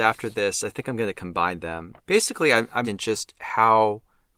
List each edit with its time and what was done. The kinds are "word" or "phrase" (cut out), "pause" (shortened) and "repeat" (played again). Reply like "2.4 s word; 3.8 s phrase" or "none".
2.0 s pause; 2.8 s word